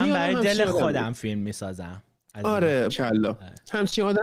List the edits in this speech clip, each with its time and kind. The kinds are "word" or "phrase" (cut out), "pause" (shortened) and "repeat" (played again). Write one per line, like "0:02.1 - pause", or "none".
0:02.2 - pause
0:02.9 - word